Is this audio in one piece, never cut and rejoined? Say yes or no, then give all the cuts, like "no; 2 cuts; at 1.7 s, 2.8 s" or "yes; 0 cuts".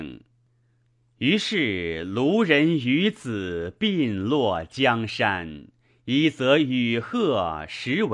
yes; 0 cuts